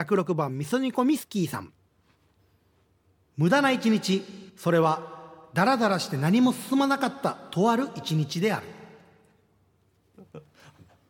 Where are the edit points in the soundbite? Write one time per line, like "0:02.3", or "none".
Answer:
0:04.5